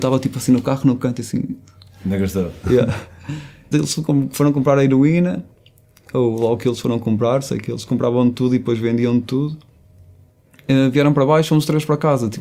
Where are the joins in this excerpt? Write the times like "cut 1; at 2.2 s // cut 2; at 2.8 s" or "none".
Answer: cut 1; at 3.7 s